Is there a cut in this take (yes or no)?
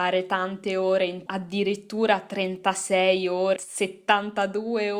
yes